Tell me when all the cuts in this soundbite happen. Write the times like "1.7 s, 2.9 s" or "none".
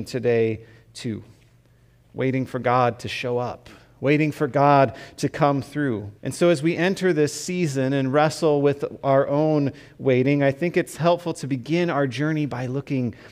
6.2 s